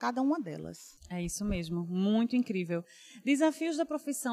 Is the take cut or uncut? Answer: uncut